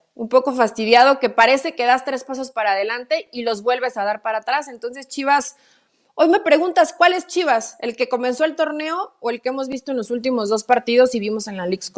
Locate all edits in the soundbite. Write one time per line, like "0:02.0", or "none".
none